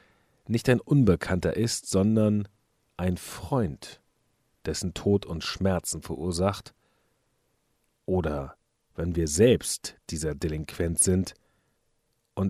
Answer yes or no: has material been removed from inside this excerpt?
no